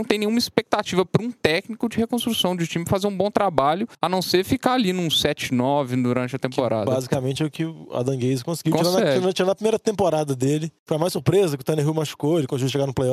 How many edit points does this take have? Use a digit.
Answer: 2